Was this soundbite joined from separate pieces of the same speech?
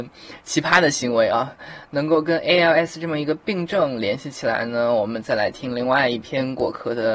no; 0 cuts

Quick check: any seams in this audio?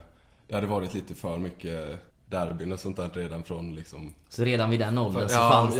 yes; 1 cut; at 2.1 s

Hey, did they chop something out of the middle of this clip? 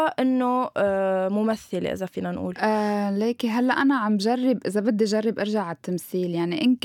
no; 0 cuts

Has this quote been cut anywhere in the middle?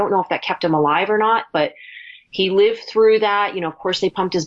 no; 0 cuts

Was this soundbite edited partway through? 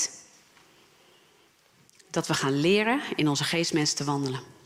no; 0 cuts

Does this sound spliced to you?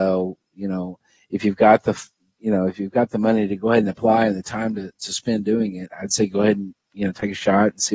no; 0 cuts

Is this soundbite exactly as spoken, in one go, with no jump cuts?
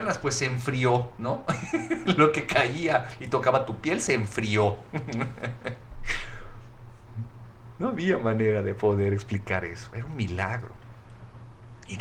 yes; 0 cuts

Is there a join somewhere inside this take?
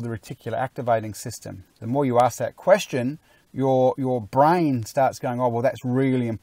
no; 0 cuts

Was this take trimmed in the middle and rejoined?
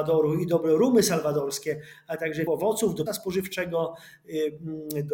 yes; 2 cuts; at 2.5 s, 3.1 s

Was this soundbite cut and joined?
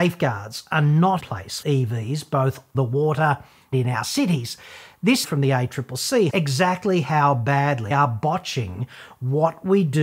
yes; 7 cuts; at 1.2 s, 1.6 s, 2.7 s, 3.7 s, 5.2 s, 6.3 s, 7.9 s

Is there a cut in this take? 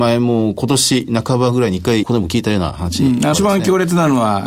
yes; 2 cuts; at 2.0 s, 3.3 s

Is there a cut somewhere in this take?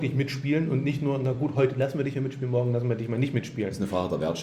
no; 0 cuts

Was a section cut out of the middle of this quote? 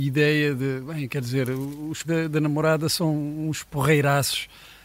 yes; 1 cut; at 2.0 s

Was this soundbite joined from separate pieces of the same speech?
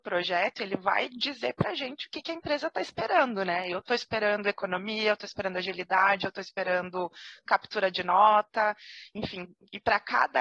no; 0 cuts

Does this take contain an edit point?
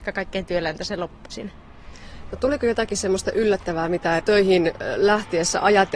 yes; 2 cuts; at 1.3 s, 4.2 s

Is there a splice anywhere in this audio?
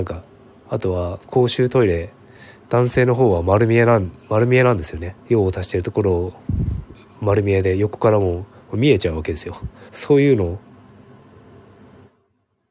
yes; 2 cuts; at 5.2 s, 9.9 s

